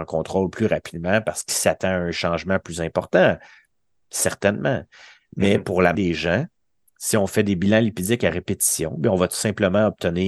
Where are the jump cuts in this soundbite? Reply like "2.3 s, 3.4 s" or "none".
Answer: 6.0 s